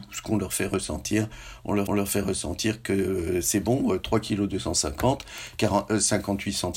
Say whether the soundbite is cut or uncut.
cut